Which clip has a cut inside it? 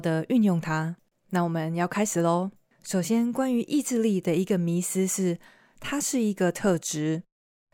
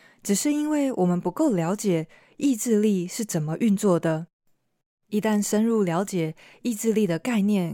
first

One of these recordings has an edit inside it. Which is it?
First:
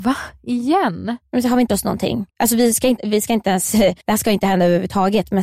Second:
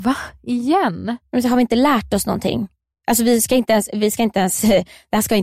first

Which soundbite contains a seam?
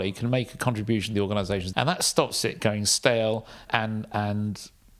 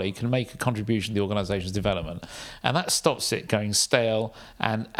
first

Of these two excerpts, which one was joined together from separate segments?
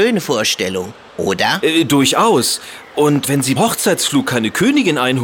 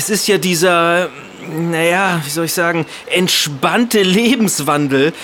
first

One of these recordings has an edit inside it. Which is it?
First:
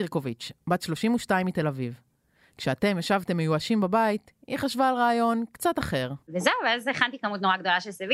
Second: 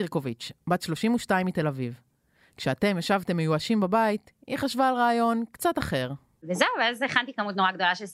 first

